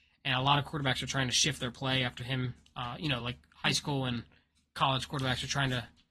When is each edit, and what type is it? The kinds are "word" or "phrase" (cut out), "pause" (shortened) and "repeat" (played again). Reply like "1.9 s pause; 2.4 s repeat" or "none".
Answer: none